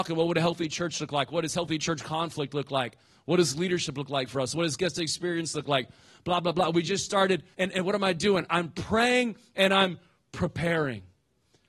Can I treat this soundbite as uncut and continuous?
no; 1 cut; at 7.5 s

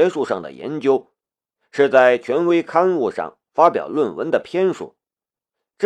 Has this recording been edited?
no; 0 cuts

